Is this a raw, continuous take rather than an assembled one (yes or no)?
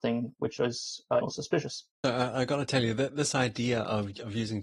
no